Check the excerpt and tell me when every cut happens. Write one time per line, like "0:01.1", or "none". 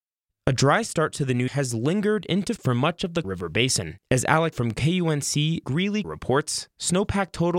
0:01.5
0:02.6
0:03.2
0:04.5
0:05.6
0:06.0